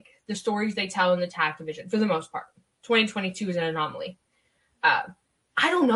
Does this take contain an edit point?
no; 0 cuts

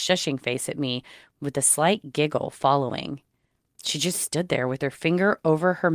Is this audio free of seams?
yes; 0 cuts

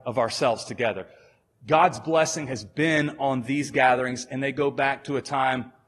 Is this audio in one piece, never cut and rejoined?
yes; 0 cuts

